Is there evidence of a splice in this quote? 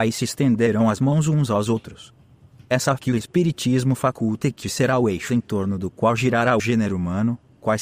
yes; 3 cuts; at 3.0 s, 4.6 s, 6.6 s

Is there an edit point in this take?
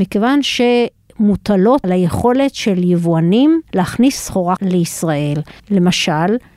yes; 4 cuts; at 1.8 s, 3.7 s, 4.6 s, 5.6 s

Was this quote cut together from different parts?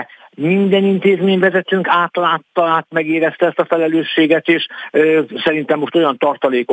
no; 0 cuts

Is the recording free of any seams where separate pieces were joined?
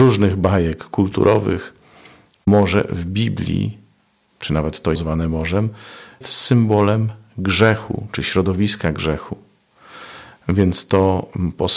no; 2 cuts; at 5.0 s, 6.2 s

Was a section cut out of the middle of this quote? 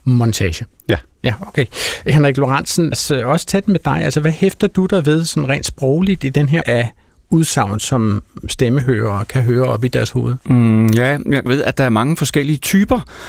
yes; 4 cuts; at 2.9 s, 6.6 s, 10.4 s, 11.5 s

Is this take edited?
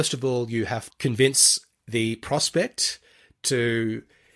yes; 1 cut; at 0.9 s

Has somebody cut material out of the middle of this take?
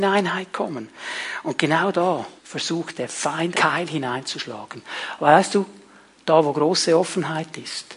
yes; 2 cuts; at 2.4 s, 3.5 s

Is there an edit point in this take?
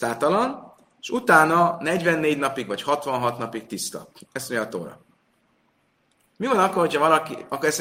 no; 0 cuts

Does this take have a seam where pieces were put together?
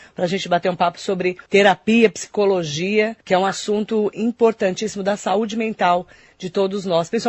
yes; 2 cuts; at 1.5 s, 3.2 s

